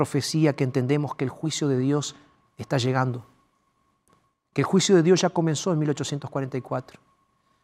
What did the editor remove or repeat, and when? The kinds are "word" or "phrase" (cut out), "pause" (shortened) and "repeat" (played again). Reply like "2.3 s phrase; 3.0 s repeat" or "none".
none